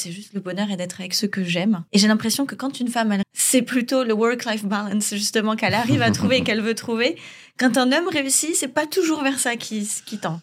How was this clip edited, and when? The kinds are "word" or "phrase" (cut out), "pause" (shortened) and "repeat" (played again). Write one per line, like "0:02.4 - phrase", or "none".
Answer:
0:01.9 - pause
0:03.2 - word